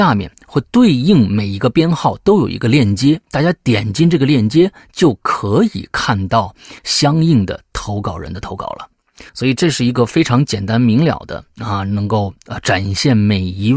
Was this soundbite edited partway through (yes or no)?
yes